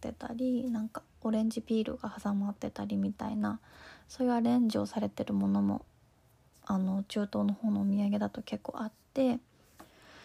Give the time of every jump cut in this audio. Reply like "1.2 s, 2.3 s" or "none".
1.1 s

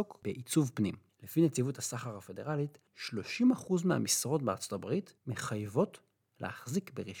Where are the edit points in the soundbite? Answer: 1.1 s, 2.9 s, 5.2 s

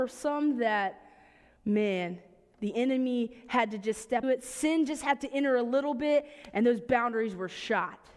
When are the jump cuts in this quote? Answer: 4.2 s

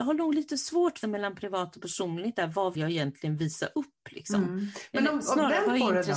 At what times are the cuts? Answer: 1.0 s, 2.7 s

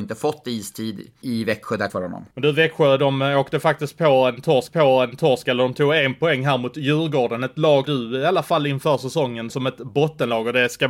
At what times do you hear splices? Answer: 1.2 s, 1.9 s, 2.3 s, 4.7 s, 7.8 s, 9.5 s

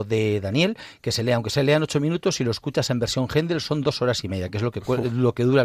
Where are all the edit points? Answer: none

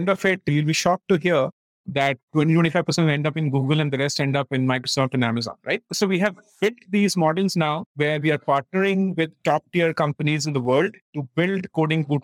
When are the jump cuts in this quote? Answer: 1.7 s, 7.9 s

